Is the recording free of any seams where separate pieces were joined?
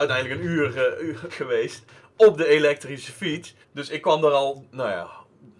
no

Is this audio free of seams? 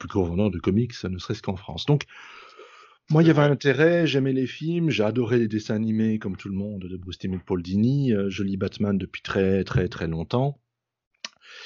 yes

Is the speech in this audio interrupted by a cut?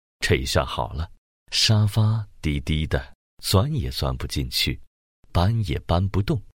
yes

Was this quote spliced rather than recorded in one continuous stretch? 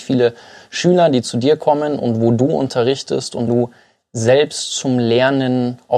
yes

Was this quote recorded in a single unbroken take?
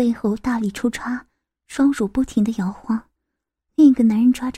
yes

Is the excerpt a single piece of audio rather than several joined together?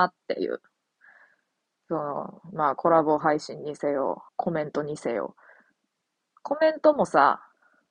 no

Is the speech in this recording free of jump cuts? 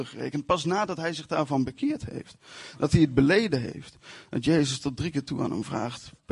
yes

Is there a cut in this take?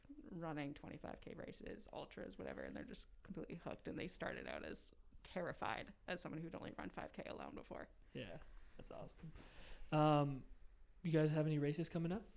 no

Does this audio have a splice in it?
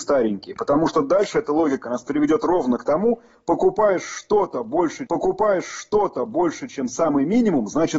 yes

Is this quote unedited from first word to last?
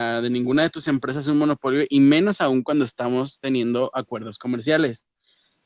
yes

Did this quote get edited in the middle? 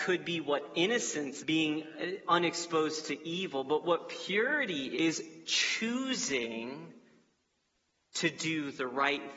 yes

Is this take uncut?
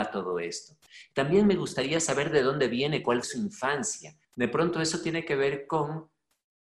no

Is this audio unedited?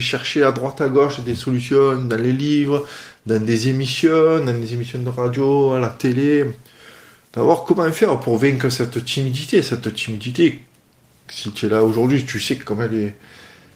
yes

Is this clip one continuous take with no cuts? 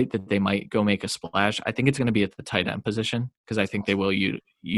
yes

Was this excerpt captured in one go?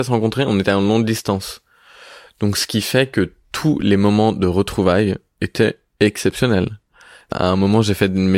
yes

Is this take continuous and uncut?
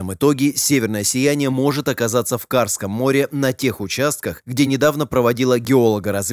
yes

